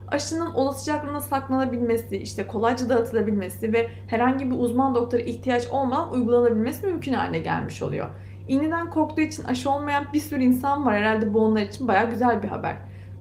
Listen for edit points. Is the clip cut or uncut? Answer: uncut